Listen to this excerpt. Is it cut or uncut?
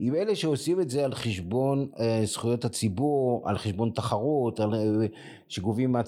uncut